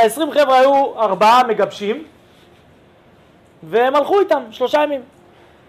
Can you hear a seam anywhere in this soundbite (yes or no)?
no